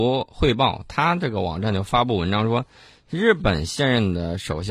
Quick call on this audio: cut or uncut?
uncut